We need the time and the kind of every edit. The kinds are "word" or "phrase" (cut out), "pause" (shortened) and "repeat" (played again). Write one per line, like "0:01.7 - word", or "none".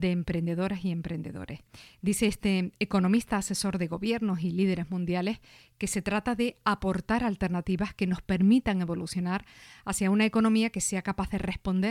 none